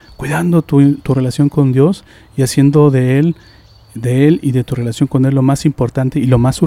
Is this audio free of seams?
yes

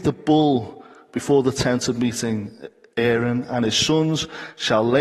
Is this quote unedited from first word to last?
yes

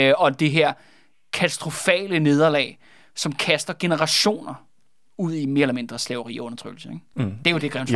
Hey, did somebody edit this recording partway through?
no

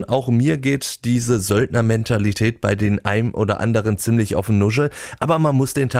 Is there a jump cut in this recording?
no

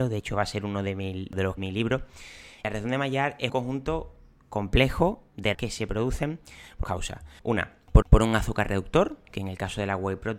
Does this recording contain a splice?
yes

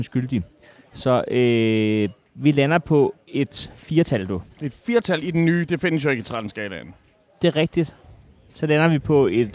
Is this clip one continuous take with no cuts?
no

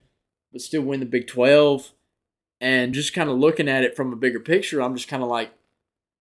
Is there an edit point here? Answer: no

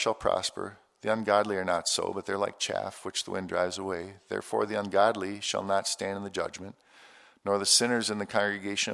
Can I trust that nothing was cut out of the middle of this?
yes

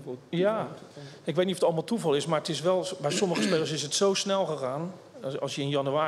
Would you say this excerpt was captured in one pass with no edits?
yes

